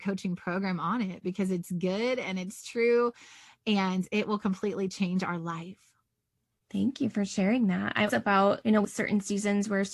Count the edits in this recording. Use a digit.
2